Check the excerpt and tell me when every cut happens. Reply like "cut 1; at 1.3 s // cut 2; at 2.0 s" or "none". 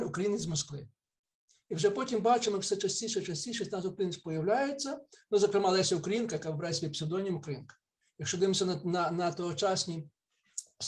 none